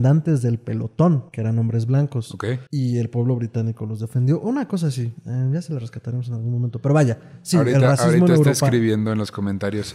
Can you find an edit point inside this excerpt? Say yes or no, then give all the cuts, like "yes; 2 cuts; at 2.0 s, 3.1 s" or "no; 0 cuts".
yes; 2 cuts; at 1.3 s, 2.7 s